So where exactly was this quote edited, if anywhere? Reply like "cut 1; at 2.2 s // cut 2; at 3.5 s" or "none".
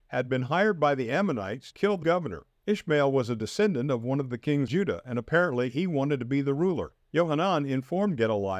cut 1; at 1.7 s // cut 2; at 2.0 s // cut 3; at 2.6 s // cut 4; at 4.7 s // cut 5; at 7.0 s